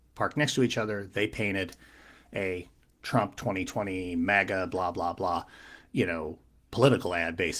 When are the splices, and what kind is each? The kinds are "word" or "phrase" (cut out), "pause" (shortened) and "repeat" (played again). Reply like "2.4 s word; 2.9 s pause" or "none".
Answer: none